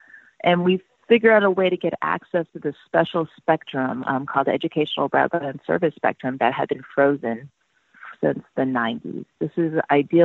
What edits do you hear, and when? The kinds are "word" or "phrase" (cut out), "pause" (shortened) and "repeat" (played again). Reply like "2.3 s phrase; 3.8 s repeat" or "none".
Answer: none